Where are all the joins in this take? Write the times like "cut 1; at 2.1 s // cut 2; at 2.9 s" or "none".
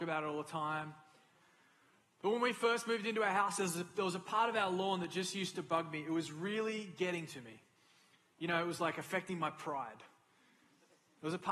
none